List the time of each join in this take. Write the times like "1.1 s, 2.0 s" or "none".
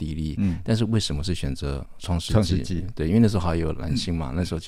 none

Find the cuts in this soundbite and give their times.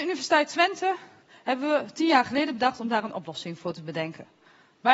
none

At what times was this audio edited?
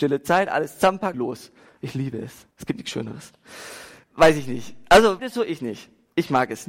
1.1 s, 2.5 s, 4.0 s, 5.2 s

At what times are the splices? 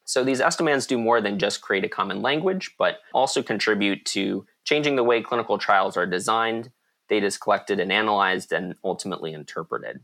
none

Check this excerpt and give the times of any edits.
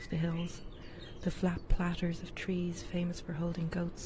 none

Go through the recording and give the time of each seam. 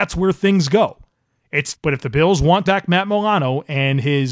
1.7 s, 2.7 s

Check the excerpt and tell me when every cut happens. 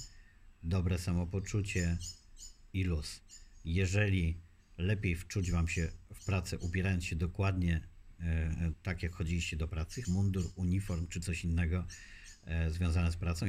10.0 s

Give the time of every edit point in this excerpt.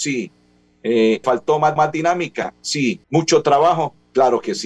1.2 s, 1.8 s, 3.0 s

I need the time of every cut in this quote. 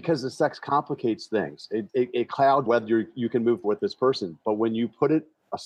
1.9 s, 2.7 s, 3.6 s

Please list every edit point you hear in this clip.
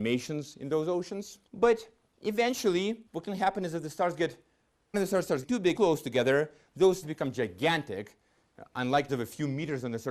1.5 s, 3.1 s, 4.9 s, 5.4 s, 5.8 s, 7.0 s, 9.1 s

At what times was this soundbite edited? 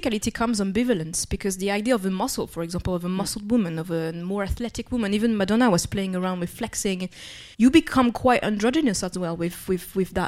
7.5 s

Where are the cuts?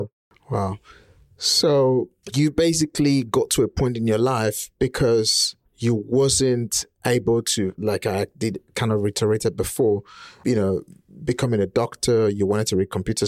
5.7 s, 7.8 s

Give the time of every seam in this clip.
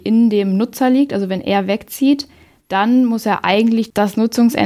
none

